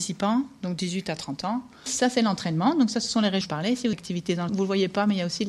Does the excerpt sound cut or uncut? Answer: cut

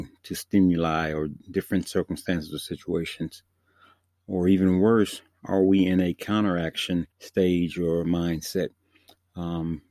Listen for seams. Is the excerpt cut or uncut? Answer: cut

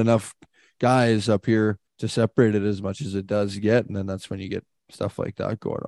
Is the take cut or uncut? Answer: cut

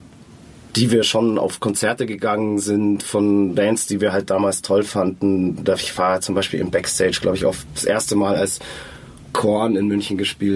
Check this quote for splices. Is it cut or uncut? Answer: uncut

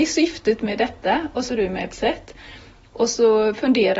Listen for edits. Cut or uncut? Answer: cut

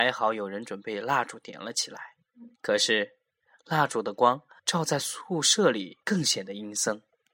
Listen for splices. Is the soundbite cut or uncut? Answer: cut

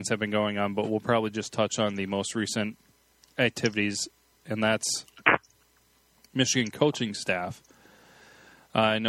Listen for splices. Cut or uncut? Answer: uncut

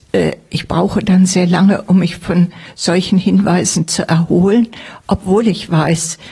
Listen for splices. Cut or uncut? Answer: uncut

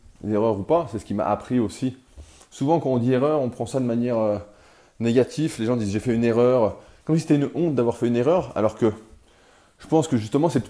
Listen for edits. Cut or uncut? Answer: uncut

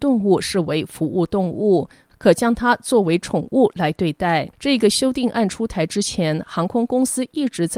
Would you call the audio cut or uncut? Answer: cut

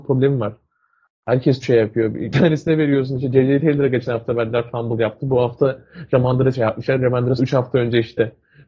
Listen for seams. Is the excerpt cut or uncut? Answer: cut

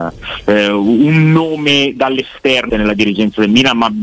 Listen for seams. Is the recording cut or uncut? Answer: cut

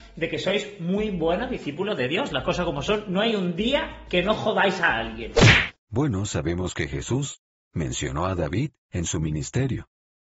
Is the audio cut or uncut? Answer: uncut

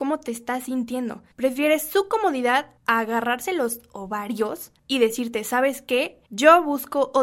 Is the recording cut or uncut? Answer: cut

